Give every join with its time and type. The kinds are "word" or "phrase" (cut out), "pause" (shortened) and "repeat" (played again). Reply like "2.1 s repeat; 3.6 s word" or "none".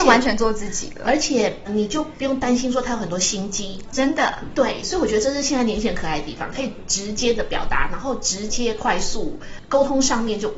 1.7 s word